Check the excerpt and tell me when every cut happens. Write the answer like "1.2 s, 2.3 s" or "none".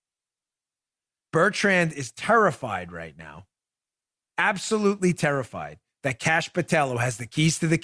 none